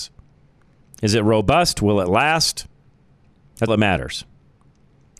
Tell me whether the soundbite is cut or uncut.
cut